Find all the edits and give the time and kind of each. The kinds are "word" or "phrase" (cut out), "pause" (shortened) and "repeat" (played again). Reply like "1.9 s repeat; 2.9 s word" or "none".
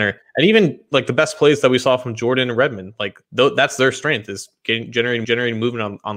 3.2 s pause; 5.2 s repeat